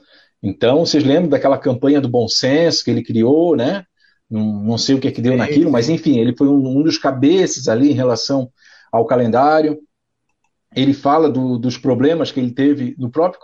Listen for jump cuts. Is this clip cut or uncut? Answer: uncut